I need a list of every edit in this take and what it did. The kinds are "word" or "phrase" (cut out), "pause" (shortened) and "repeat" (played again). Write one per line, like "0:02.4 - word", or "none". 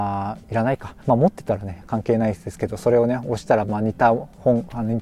0:01.0 - pause